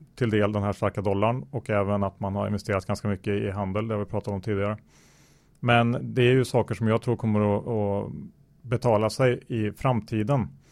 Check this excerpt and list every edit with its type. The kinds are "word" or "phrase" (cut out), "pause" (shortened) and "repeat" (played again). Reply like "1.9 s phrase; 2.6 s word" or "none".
none